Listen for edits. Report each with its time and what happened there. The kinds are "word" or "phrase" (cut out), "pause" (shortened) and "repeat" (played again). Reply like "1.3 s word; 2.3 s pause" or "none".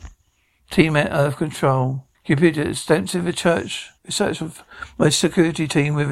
2.1 s pause; 4.0 s pause